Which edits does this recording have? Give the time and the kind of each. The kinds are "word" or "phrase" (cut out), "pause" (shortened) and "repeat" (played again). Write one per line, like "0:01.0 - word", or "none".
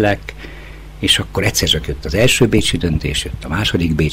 none